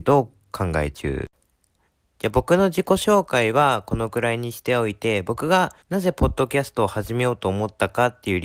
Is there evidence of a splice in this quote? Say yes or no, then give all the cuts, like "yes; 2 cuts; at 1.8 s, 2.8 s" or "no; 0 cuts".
yes; 1 cut; at 5.8 s